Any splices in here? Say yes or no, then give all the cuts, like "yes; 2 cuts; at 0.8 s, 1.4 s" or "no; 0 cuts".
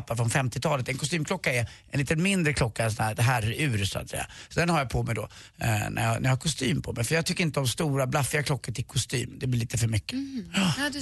no; 0 cuts